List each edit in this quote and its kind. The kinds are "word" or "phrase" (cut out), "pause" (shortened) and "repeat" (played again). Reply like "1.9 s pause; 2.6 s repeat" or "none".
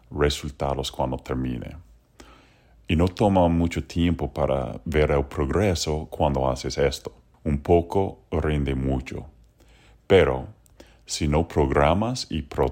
none

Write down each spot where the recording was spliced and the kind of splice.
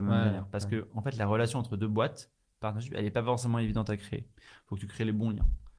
none

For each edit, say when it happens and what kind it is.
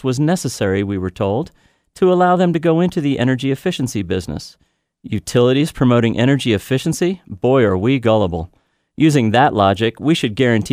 none

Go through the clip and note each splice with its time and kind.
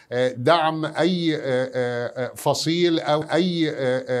3.2 s repeat

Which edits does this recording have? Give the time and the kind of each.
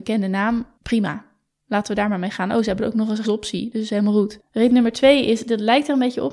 3.2 s word

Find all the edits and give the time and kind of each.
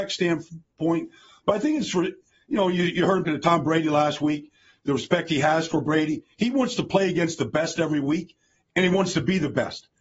3.2 s phrase

